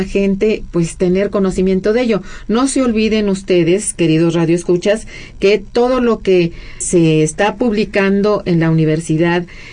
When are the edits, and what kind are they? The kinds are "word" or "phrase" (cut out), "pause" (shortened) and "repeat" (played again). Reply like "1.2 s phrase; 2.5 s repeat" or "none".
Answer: 6.8 s word